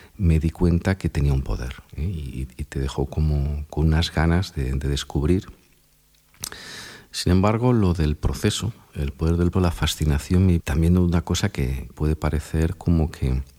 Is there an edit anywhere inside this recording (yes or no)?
yes